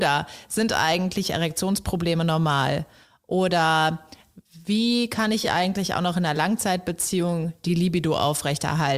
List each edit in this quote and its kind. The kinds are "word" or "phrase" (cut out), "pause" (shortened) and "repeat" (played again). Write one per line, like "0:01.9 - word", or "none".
none